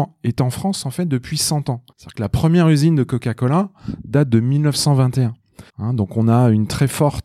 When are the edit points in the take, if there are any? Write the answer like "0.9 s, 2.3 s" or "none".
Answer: 1.9 s, 5.7 s